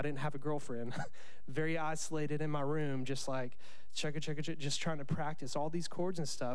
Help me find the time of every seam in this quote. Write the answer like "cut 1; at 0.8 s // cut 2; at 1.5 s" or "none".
none